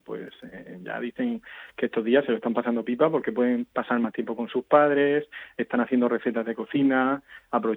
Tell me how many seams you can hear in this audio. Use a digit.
0